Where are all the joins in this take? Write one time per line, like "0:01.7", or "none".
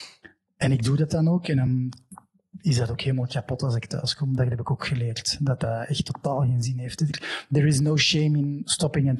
none